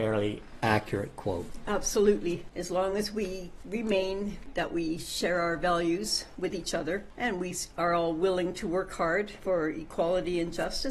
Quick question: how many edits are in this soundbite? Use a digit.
0